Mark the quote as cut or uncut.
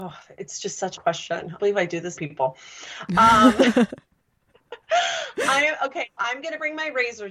cut